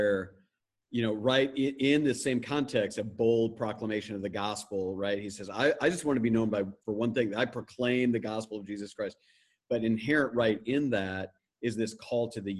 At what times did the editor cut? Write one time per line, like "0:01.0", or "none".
0:06.8